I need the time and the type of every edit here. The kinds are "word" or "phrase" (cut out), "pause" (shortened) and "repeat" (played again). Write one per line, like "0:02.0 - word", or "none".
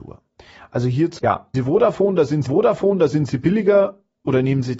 0:01.2 - word
0:01.5 - word
0:02.5 - repeat